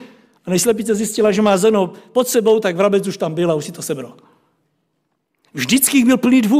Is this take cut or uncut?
uncut